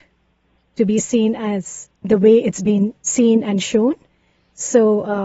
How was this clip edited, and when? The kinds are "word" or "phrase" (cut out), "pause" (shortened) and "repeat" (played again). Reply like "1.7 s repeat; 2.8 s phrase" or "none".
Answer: 1.9 s pause